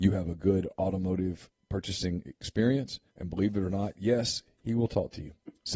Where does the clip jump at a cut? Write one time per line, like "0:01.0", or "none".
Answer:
0:03.1